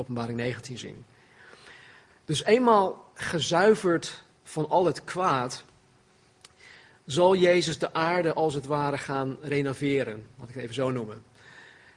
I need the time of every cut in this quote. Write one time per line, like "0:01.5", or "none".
none

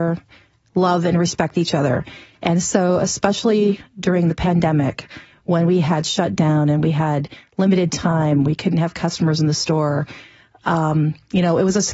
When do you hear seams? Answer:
none

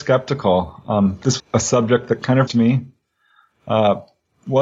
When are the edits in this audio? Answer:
0:01.4
0:02.5

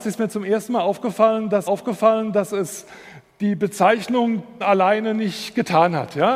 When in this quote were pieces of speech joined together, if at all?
0:01.7
0:04.6

